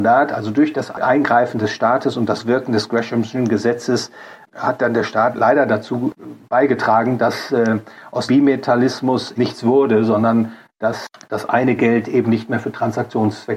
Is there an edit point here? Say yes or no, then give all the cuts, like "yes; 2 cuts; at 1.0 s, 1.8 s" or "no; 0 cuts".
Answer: yes; 2 cuts; at 8.3 s, 9.4 s